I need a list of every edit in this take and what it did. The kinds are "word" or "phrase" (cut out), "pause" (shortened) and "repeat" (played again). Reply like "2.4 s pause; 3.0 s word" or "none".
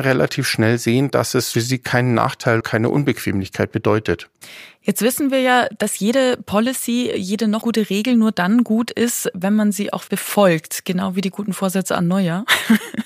1.5 s word; 2.6 s word; 7.6 s word; 10.1 s word